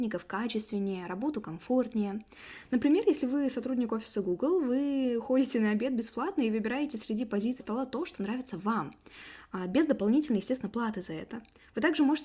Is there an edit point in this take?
yes; 1 cut; at 7.6 s

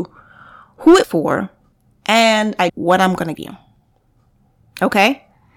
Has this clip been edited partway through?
yes; 4 cuts; at 1.0 s, 1.7 s, 2.7 s, 3.4 s

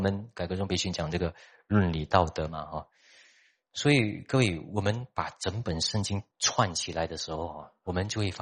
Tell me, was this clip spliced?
yes; 1 cut; at 6.3 s

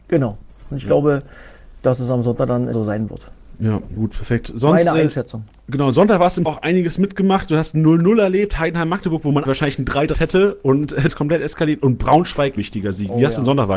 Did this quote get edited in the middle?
yes; 7 cuts; at 2.7 s, 4.0 s, 6.5 s, 9.5 s, 10.1 s, 11.1 s, 12.6 s

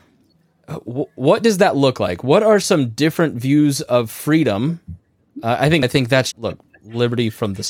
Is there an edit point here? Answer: yes; 2 cuts; at 5.8 s, 6.3 s

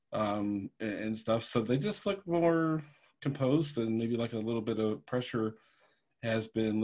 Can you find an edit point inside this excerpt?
no; 0 cuts

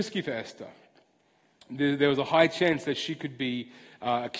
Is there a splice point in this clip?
no; 0 cuts

